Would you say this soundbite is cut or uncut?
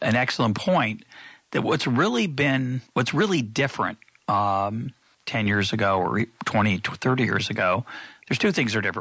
cut